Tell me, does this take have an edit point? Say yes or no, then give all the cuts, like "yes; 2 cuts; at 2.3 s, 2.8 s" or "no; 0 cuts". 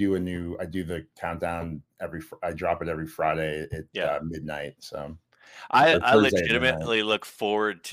no; 0 cuts